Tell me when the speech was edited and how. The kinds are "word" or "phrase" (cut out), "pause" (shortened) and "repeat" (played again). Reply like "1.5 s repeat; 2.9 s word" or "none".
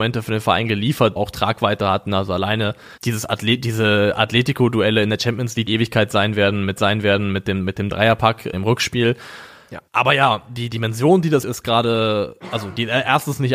1.2 s phrase; 3.0 s pause; 5.7 s phrase; 6.8 s repeat; 8.5 s word; 9.9 s pause; 11.4 s word; 12.4 s pause